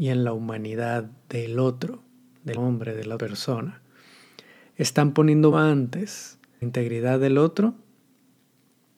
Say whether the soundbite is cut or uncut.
cut